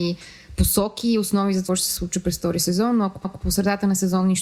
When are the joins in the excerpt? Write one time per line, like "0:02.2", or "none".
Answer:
0:01.7
0:03.2